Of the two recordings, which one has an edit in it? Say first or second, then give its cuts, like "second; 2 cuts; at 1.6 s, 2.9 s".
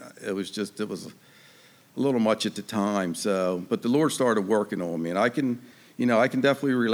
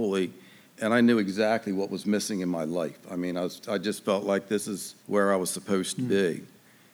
second; 1 cut; at 5.0 s